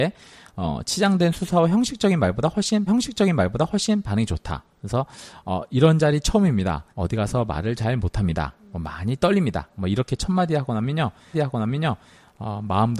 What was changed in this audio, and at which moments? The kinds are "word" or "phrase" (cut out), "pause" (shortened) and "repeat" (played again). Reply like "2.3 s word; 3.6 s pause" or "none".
2.9 s repeat; 6.9 s pause; 11.3 s repeat